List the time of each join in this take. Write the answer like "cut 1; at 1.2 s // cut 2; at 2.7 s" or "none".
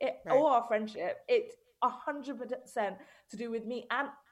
none